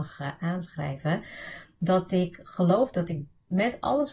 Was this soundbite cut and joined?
no; 0 cuts

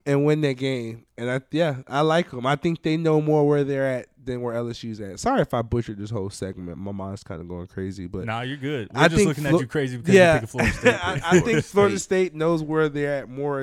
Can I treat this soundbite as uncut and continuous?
yes; 0 cuts

